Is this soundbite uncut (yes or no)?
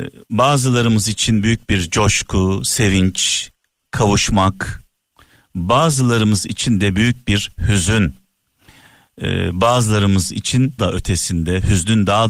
no